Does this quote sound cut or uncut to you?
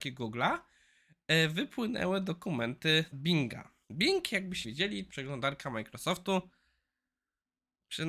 cut